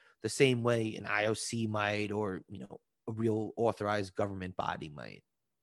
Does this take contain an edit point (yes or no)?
no